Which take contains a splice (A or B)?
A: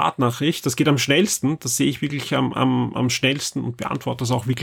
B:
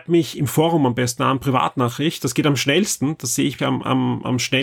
B